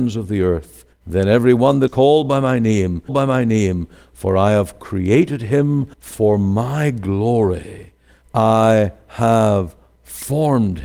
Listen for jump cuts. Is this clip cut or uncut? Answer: cut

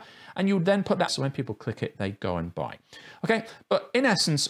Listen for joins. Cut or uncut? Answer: cut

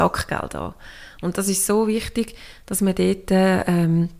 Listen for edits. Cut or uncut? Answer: uncut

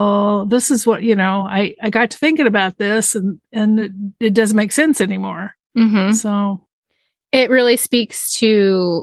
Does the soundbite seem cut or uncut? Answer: uncut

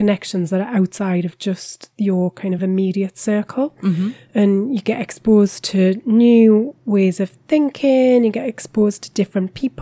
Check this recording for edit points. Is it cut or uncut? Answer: uncut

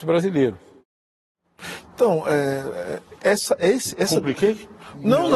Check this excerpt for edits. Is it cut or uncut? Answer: uncut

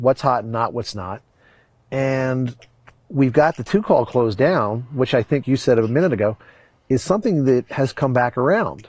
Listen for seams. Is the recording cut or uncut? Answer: cut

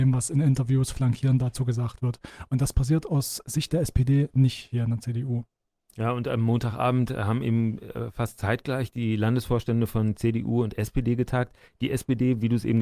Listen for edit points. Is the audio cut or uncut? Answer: uncut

